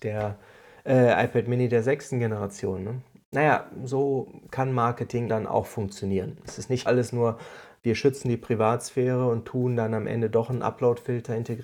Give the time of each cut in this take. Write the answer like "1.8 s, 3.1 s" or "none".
5.3 s, 6.9 s